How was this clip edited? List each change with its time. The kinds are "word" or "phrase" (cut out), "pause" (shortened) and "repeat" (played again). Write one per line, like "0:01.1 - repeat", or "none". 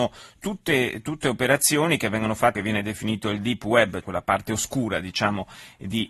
0:02.5 - phrase
0:04.0 - word